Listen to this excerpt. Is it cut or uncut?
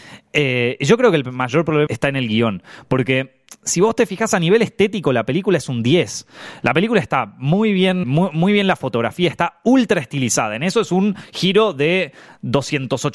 cut